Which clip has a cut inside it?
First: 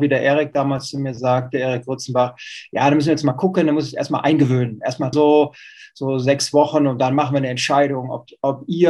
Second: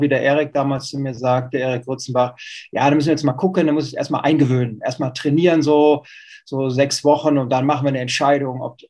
first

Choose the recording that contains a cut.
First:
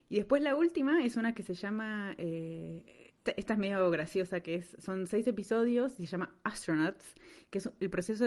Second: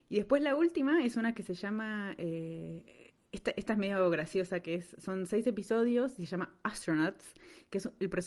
first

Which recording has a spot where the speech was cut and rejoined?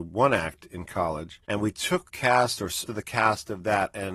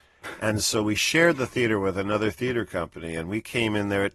first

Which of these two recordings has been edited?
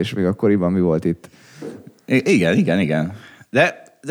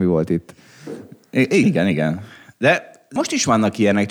second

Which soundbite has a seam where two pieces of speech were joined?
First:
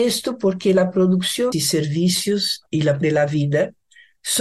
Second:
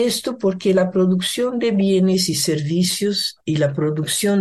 first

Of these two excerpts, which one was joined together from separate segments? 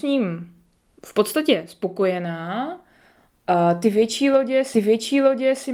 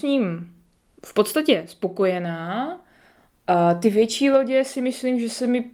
first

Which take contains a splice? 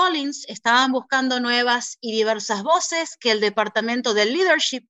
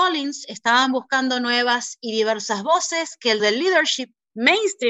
second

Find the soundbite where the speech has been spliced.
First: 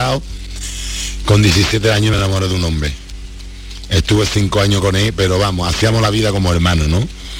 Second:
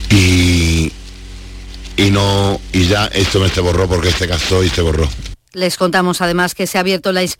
second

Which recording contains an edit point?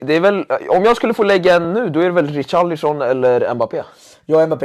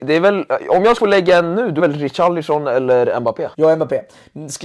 second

